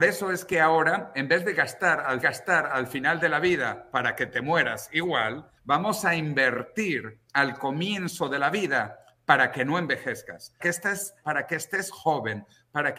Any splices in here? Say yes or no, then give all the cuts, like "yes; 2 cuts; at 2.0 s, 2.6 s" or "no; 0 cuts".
yes; 4 cuts; at 2.2 s, 5.6 s, 10.6 s, 11.2 s